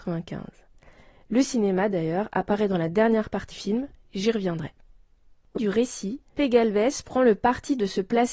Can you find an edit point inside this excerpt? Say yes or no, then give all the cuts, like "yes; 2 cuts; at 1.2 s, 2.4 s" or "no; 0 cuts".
yes; 3 cuts; at 3.5 s, 5.6 s, 6.3 s